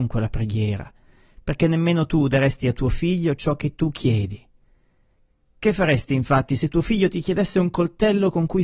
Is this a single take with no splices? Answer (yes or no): yes